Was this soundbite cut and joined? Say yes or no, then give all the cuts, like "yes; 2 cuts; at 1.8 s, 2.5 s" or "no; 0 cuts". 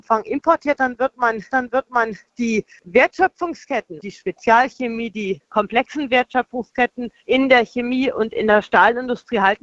yes; 3 cuts; at 1.5 s, 4.0 s, 7.2 s